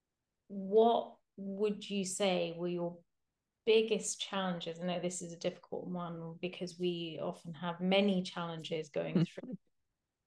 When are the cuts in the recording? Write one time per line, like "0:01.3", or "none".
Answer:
none